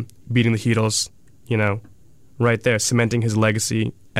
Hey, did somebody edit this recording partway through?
no; 0 cuts

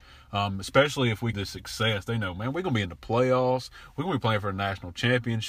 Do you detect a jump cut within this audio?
yes; 1 cut; at 1.3 s

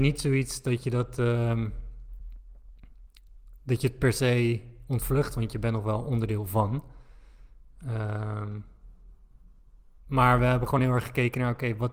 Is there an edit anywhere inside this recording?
no; 0 cuts

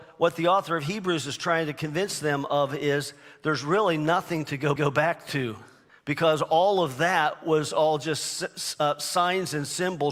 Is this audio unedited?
no; 2 cuts; at 4.8 s, 5.9 s

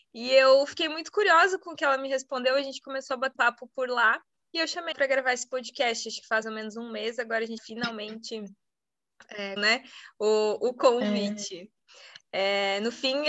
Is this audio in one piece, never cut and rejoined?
no; 5 cuts; at 3.4 s, 4.9 s, 6.4 s, 7.6 s, 9.6 s

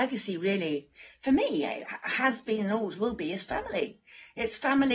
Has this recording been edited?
no; 0 cuts

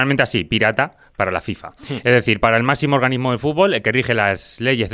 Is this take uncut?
yes; 0 cuts

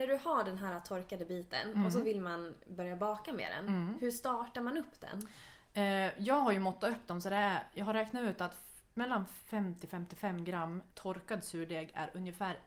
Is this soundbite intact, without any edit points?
no; 1 cut; at 10.9 s

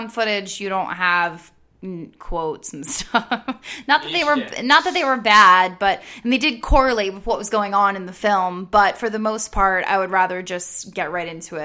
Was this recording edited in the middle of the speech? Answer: no; 0 cuts

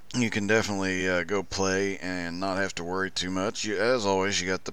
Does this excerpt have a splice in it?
no; 0 cuts

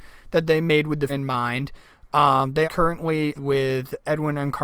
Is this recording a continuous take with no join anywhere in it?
no; 3 cuts; at 1.1 s, 2.6 s, 3.4 s

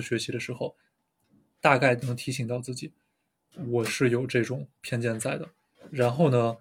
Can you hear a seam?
yes; 1 cut; at 4.8 s

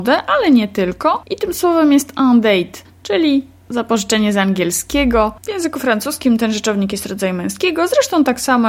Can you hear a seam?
yes; 2 cuts; at 2.8 s, 5.4 s

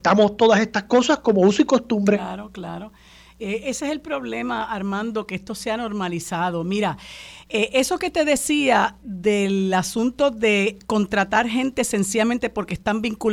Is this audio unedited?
yes; 0 cuts

